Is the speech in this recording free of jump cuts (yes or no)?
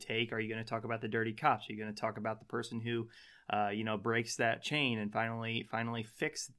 yes